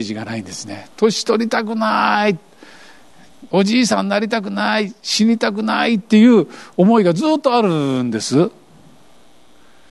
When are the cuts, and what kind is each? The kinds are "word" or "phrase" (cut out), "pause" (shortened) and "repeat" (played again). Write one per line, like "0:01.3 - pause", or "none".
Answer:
none